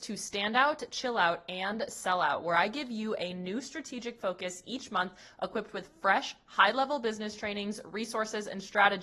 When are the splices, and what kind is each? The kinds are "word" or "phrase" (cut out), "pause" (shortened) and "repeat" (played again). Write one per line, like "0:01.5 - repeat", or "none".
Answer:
none

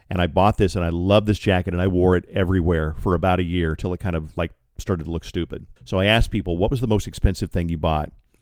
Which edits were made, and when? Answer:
0:05.8 - pause

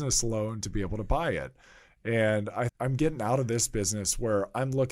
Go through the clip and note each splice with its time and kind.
0:02.7 - word

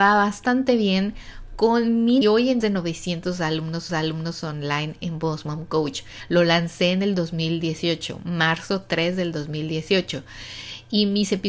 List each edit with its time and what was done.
0:02.2 - phrase
0:02.6 - phrase
0:03.9 - repeat

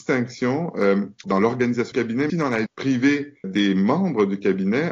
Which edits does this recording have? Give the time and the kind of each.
0:01.2 - word
0:01.9 - word
0:02.3 - word
0:02.7 - word
0:03.4 - word

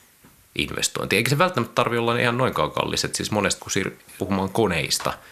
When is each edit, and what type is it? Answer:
0:03.6 - word
0:04.2 - word

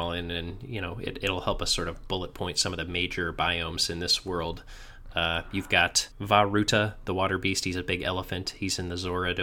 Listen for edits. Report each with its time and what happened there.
0:06.1 - pause

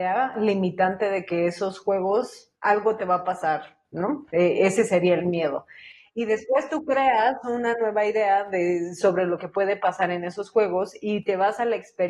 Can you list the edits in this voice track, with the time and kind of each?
0:02.6 - pause

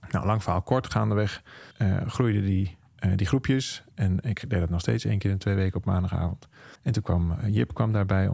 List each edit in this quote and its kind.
0:01.7 - pause
0:06.7 - pause

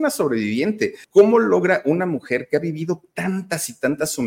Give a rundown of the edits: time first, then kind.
0:01.0 - pause

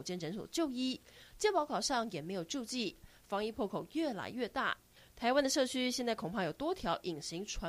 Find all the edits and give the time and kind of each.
none

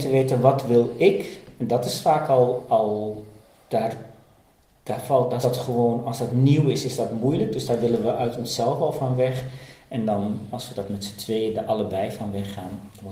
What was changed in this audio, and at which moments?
0:03.4 - pause
0:05.4 - phrase

